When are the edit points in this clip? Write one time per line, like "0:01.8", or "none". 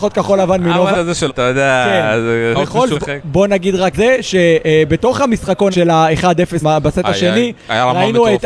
0:00.9
0:01.3
0:02.5
0:02.9
0:03.9
0:05.7
0:06.6